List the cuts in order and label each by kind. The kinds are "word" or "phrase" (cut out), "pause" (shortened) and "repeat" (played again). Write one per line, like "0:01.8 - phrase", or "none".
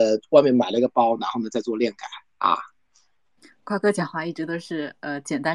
0:03.4 - pause